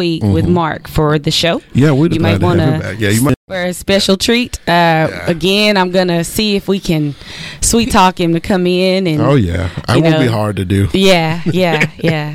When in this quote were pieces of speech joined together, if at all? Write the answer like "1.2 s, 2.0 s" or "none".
2.1 s